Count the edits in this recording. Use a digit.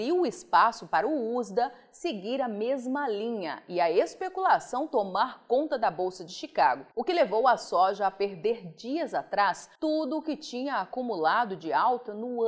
2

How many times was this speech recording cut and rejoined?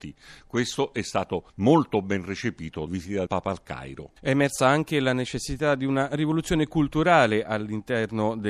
2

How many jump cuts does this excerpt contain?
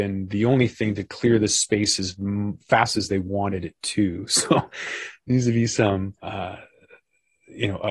1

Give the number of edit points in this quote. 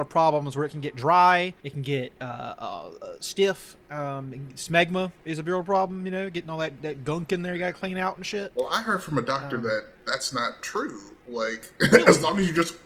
1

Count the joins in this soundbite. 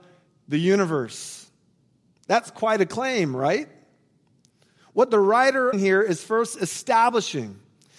1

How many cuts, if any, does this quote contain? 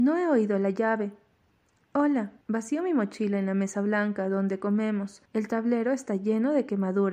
2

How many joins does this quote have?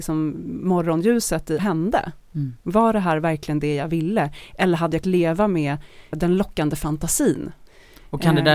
4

